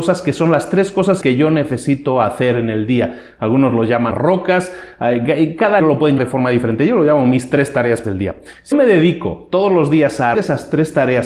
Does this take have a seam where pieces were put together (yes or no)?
yes